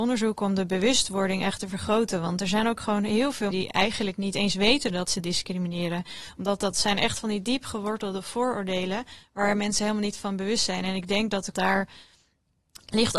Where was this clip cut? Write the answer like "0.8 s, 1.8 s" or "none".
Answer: 3.5 s, 11.5 s